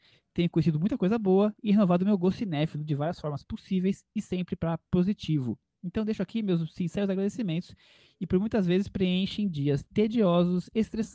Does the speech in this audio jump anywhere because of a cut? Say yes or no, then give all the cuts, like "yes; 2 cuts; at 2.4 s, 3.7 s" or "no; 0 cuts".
no; 0 cuts